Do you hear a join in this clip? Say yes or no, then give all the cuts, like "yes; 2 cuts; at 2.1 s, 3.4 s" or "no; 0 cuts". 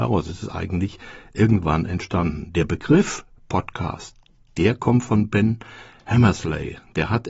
no; 0 cuts